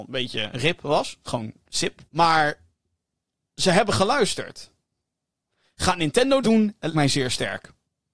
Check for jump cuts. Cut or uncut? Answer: cut